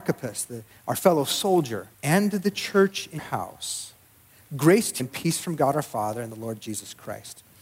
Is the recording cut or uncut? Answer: cut